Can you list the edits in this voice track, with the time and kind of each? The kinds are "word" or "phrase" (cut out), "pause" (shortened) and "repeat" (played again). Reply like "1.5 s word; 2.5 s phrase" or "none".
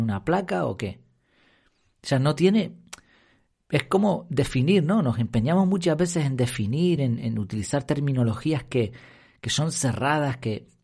none